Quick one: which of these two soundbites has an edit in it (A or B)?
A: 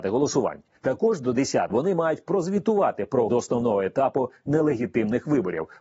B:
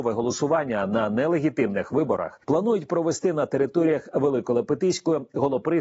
A